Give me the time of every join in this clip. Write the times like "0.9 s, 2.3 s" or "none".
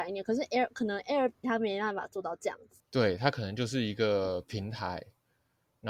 1.4 s, 2.9 s

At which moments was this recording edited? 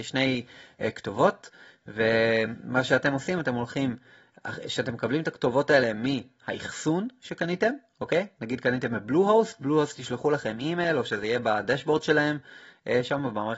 none

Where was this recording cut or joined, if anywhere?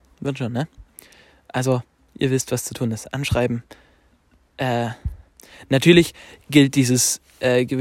none

